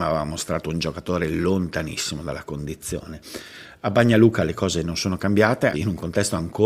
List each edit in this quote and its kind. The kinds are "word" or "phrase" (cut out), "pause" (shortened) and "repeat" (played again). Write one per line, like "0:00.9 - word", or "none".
0:05.7 - word